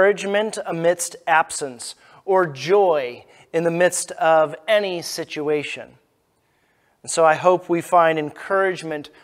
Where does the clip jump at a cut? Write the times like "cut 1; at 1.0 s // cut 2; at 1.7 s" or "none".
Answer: none